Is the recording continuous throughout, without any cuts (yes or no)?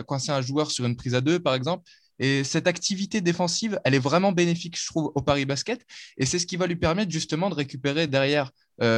yes